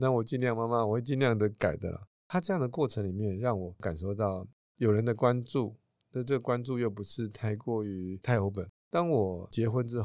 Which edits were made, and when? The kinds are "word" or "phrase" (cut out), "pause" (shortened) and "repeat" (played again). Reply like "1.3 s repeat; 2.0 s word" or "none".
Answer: none